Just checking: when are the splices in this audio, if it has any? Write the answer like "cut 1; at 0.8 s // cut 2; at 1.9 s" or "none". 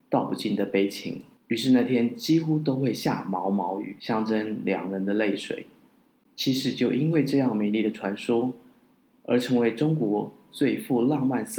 none